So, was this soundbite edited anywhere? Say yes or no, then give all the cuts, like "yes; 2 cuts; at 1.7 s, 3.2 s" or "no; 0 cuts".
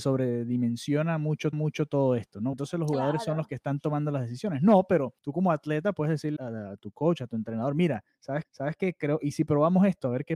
yes; 5 cuts; at 1.5 s, 2.5 s, 5.2 s, 6.4 s, 8.4 s